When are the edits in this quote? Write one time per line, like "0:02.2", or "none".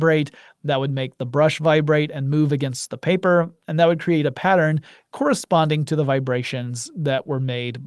none